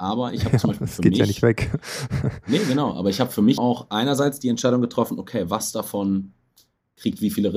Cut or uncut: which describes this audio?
cut